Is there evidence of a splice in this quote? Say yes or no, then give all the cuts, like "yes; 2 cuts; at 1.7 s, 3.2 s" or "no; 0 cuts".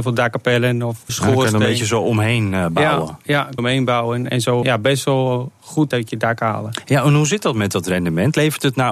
yes; 4 cuts; at 1.1 s, 3.6 s, 4.6 s, 5.9 s